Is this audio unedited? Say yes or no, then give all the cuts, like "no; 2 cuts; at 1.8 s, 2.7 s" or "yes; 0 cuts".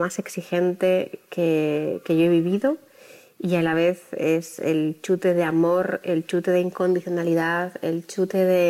yes; 0 cuts